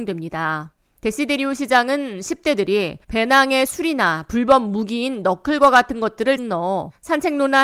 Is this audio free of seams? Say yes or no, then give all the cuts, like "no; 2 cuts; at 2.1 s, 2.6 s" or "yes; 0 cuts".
no; 2 cuts; at 3.0 s, 6.4 s